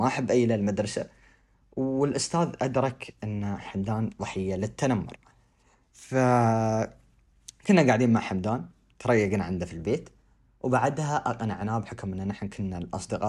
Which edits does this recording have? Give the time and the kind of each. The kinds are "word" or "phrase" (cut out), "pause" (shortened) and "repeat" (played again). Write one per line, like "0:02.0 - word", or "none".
none